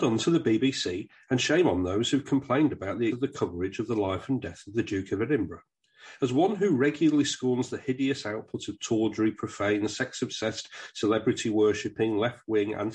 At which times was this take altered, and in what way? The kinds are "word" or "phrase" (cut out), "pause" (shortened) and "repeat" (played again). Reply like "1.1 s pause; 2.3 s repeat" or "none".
3.1 s word

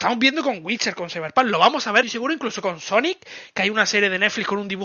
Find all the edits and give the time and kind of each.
2.0 s word

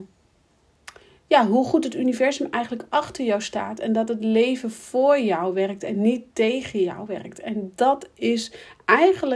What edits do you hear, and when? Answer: none

